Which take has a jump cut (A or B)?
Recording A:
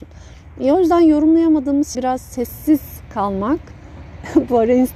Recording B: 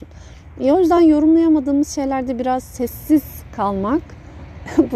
A